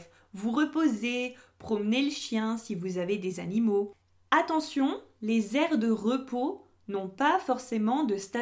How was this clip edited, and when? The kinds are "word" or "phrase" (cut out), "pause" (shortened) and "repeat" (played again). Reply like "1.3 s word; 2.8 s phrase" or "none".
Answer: none